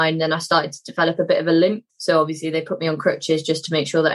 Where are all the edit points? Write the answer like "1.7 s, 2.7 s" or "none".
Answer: 1.9 s